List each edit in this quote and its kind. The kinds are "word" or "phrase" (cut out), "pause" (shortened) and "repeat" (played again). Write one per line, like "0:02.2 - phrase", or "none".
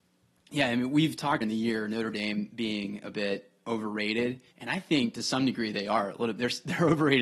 0:01.4 - word
0:04.5 - pause